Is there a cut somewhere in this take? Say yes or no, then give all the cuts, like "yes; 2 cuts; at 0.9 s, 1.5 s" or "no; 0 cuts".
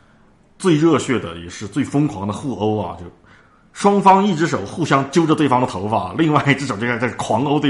no; 0 cuts